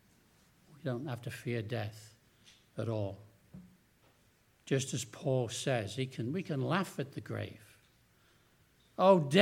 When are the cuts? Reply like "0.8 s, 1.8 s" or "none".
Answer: none

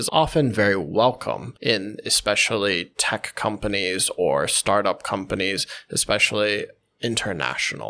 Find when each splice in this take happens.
none

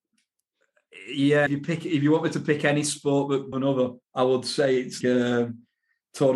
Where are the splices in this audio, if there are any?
1.5 s, 3.5 s, 4.0 s, 5.0 s

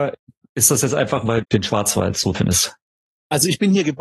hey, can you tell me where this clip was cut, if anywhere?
1.4 s, 2.3 s

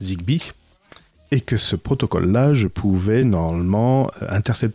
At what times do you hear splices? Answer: none

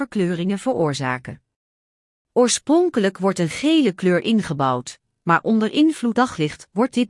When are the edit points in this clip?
6.1 s

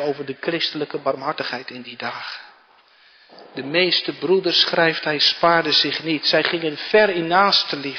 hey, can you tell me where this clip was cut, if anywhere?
none

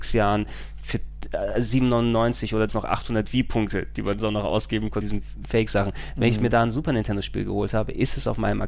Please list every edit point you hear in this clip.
2.7 s, 4.2 s, 5.0 s

